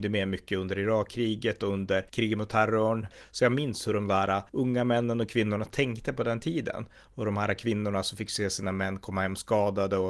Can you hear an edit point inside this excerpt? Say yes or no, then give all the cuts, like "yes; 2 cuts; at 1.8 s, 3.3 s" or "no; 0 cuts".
yes; 2 cuts; at 2.1 s, 4.5 s